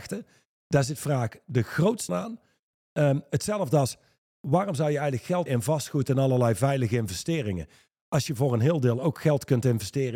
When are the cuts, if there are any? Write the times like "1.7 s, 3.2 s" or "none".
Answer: 2.1 s, 5.5 s

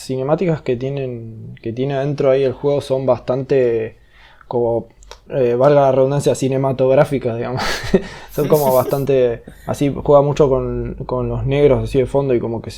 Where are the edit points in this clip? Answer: 5.3 s

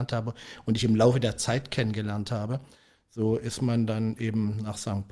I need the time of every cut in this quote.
none

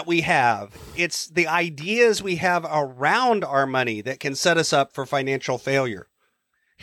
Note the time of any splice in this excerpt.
none

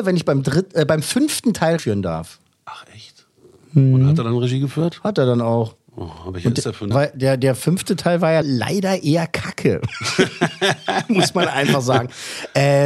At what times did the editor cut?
1.8 s, 6.9 s, 8.4 s

